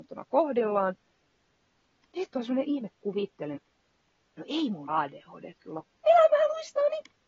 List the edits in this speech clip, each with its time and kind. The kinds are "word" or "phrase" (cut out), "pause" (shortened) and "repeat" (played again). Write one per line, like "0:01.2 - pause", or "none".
0:02.3 - pause
0:03.6 - word
0:04.9 - word
0:05.8 - word